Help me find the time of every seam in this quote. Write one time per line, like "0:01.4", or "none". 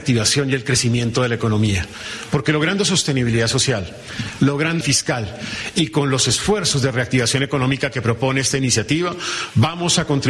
0:04.8